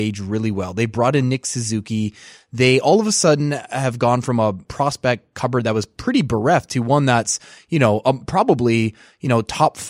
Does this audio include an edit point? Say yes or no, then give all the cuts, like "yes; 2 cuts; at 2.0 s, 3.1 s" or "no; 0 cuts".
no; 0 cuts